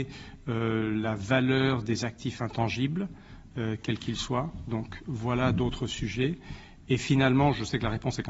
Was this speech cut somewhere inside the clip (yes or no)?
no